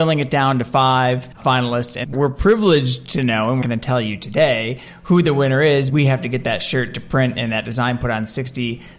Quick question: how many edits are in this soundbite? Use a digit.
3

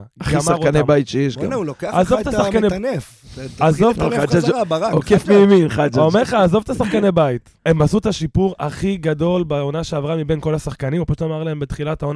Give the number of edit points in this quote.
1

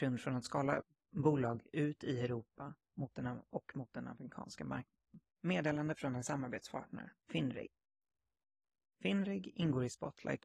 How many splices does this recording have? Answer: 2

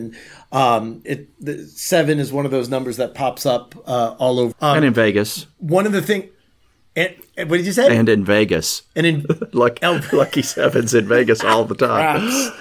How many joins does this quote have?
2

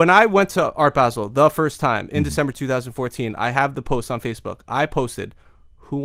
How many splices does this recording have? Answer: 0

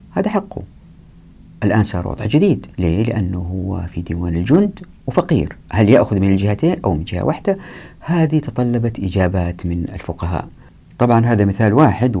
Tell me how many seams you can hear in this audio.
2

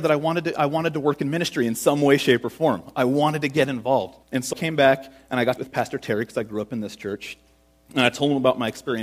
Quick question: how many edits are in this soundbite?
3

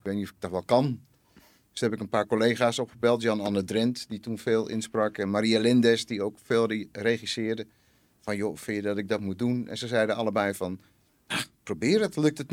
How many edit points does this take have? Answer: 0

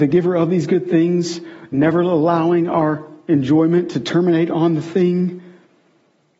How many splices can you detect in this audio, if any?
0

